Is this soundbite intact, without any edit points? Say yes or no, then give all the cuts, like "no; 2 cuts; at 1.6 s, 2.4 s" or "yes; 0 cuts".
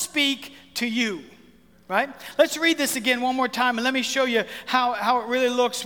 yes; 0 cuts